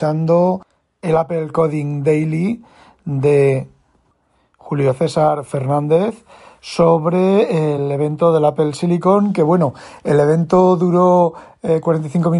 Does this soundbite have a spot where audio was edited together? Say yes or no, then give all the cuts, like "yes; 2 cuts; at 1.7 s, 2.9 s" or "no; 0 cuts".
no; 0 cuts